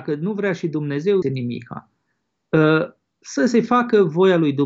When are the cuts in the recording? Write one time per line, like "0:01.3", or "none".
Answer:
0:01.2